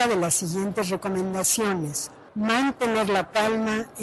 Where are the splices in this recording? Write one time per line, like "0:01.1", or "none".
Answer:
0:02.3